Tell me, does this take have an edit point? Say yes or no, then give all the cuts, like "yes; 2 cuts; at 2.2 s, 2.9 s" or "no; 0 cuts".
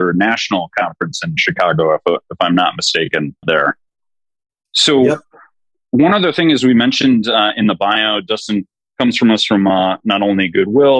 yes; 1 cut; at 3.4 s